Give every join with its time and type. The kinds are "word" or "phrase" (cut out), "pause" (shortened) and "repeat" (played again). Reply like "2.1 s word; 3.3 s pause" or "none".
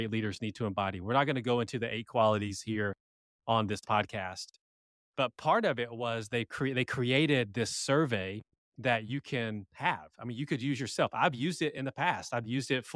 none